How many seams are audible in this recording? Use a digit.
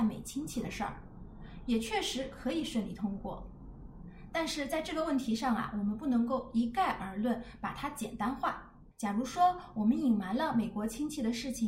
1